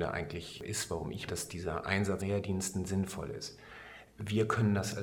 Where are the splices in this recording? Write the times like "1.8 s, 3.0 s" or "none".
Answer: 1.3 s, 2.2 s